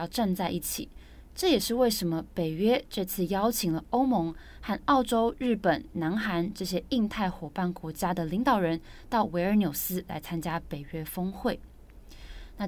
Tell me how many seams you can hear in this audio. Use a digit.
1